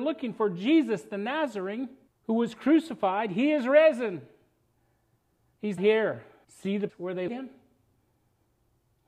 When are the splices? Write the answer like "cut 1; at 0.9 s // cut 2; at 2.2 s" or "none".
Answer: cut 1; at 2.1 s // cut 2; at 5.8 s // cut 3; at 6.4 s // cut 4; at 6.9 s // cut 5; at 7.3 s

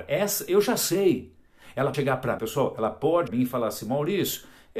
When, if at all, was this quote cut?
cut 1; at 1.9 s // cut 2; at 2.4 s // cut 3; at 3.3 s

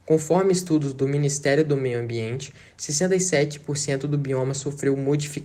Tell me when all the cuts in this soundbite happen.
none

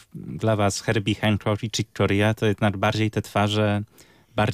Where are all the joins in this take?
none

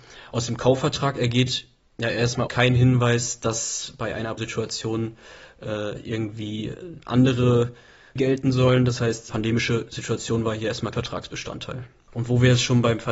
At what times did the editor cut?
cut 1; at 2.5 s // cut 2; at 4.4 s // cut 3; at 8.2 s // cut 4; at 9.3 s // cut 5; at 10.9 s

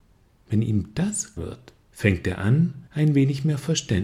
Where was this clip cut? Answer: cut 1; at 1.4 s // cut 2; at 1.8 s // cut 3; at 2.9 s

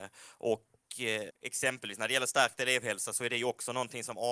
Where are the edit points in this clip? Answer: cut 1; at 1.3 s

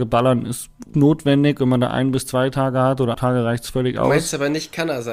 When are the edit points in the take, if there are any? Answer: cut 1; at 0.9 s // cut 2; at 3.1 s

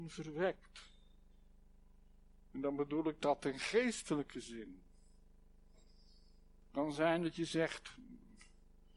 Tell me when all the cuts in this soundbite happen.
none

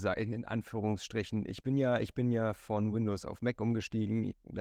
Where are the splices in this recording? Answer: none

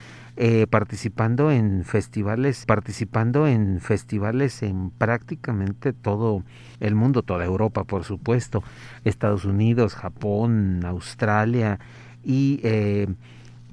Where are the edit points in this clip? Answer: cut 1; at 2.6 s // cut 2; at 6.7 s

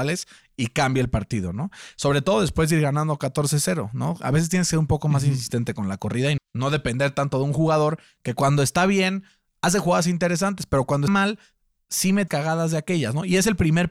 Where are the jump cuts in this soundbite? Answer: cut 1; at 6.4 s // cut 2; at 11.1 s // cut 3; at 12.3 s

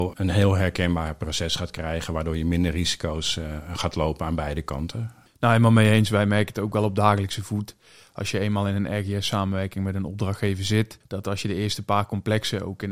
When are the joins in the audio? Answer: none

